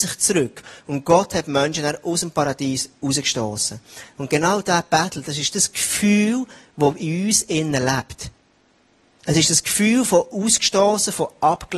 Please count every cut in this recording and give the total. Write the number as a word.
zero